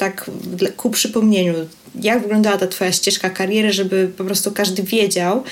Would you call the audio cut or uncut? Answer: uncut